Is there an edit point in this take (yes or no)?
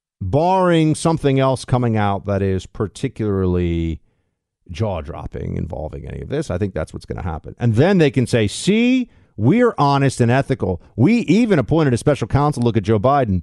no